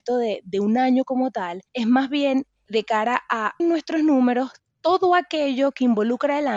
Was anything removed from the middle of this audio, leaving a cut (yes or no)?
yes